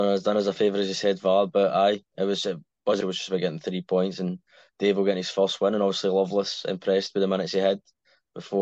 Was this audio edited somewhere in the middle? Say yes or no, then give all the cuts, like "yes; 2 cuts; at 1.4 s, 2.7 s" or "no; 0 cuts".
yes; 1 cut; at 3.0 s